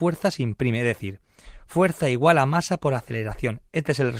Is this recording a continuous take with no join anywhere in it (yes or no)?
yes